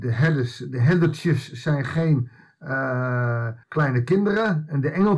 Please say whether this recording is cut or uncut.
cut